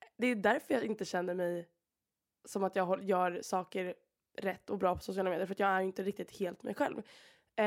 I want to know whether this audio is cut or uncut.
uncut